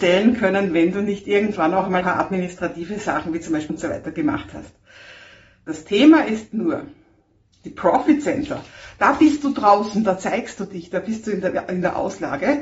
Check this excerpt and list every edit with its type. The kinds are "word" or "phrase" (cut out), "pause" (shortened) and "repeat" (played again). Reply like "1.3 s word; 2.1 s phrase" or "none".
2.0 s word; 3.7 s word